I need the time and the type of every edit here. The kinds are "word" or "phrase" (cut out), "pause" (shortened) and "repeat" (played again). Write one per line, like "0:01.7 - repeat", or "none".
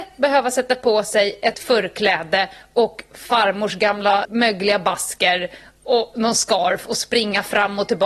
0:01.5 - word
0:04.2 - word